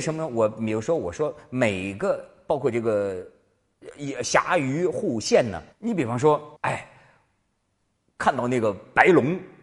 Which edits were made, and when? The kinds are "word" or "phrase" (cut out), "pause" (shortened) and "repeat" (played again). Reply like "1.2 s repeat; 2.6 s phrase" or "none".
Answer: 5.7 s pause; 6.6 s pause